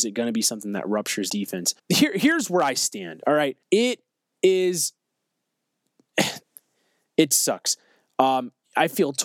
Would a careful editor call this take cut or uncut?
cut